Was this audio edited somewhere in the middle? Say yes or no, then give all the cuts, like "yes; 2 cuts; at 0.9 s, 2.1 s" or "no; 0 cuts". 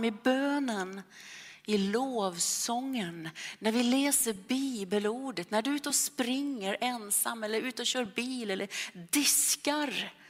no; 0 cuts